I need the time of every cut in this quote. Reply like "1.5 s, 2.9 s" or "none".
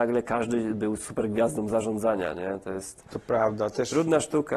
none